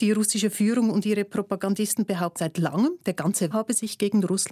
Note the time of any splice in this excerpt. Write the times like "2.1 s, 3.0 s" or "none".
2.4 s, 3.5 s